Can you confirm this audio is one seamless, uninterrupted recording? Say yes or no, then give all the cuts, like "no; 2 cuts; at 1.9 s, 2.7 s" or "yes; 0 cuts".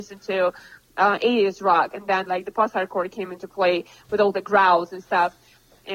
yes; 0 cuts